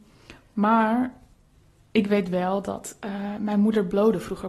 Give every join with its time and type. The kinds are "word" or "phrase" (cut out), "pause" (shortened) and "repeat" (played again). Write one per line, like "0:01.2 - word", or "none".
none

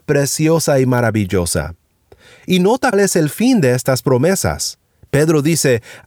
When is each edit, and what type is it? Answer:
0:02.9 - word

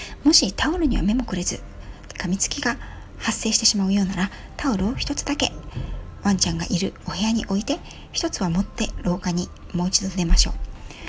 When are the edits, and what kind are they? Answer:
0:02.1 - phrase

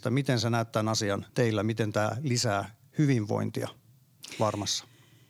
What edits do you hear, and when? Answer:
0:01.3 - pause

